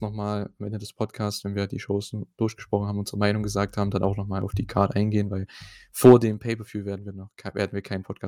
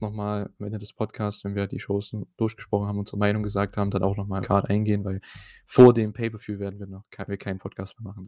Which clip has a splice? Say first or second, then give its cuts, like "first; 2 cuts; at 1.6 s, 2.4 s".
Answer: second; 2 cuts; at 4.4 s, 7.3 s